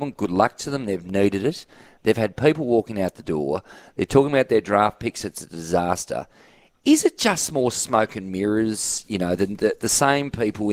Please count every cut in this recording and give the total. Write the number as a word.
zero